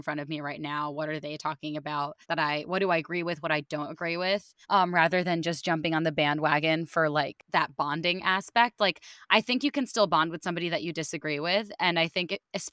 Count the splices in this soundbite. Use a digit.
2